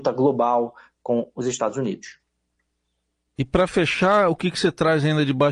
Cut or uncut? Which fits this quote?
uncut